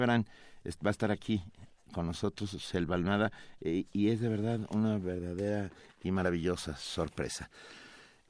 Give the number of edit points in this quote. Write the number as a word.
zero